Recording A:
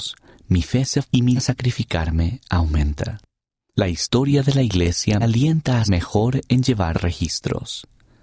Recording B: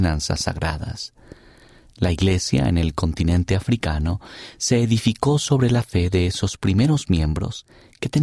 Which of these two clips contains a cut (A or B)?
A